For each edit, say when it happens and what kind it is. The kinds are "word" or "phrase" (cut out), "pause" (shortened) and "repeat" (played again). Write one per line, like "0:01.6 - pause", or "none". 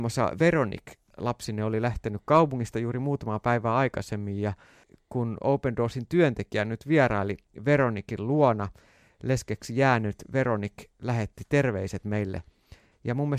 none